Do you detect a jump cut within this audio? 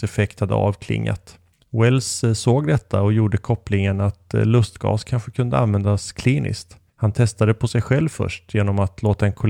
yes; 2 cuts; at 1.5 s, 6.9 s

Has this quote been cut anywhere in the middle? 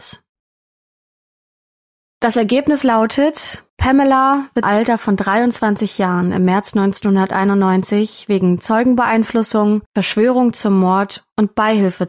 yes; 3 cuts; at 3.7 s, 4.6 s, 9.9 s

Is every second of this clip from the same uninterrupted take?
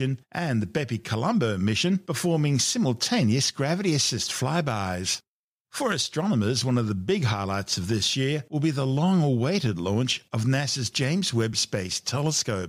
yes; 0 cuts

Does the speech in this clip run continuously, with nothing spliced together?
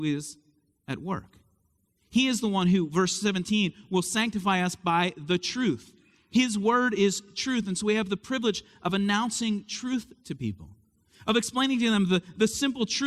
yes; 0 cuts

